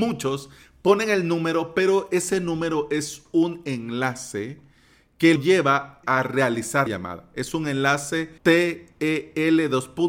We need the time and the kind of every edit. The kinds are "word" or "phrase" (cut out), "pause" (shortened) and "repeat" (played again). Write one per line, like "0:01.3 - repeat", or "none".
0:05.4 - word
0:06.0 - word
0:06.9 - word
0:08.4 - pause